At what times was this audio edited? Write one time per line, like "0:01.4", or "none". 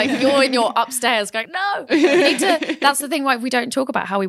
0:01.4